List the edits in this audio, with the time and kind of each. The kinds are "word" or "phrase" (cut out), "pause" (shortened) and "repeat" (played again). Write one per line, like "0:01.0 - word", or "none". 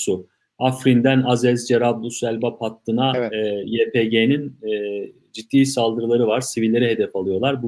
none